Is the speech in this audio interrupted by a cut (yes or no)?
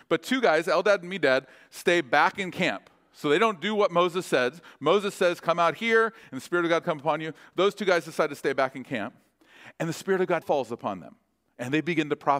yes